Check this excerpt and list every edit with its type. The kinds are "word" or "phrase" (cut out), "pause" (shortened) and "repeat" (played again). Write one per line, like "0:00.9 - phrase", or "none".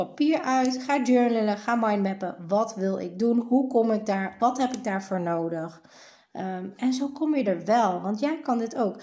none